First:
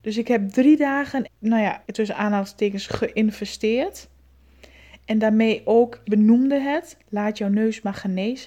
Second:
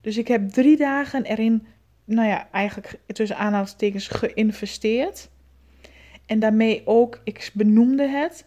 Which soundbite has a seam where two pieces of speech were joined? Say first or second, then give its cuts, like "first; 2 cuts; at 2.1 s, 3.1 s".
first; 3 cuts; at 1.2 s, 1.8 s, 6.0 s